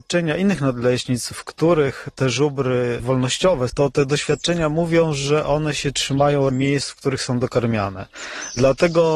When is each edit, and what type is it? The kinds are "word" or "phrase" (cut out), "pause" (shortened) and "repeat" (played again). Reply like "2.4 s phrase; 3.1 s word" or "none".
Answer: 3.7 s word; 6.5 s word